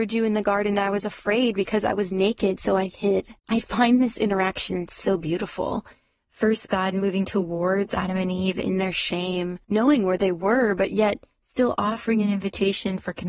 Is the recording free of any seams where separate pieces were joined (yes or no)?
no